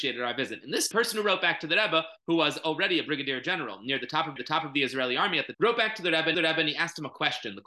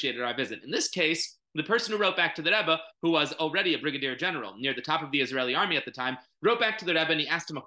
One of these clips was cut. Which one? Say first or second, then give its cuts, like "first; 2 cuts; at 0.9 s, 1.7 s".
first; 4 cuts; at 0.9 s, 4.4 s, 5.5 s, 6.3 s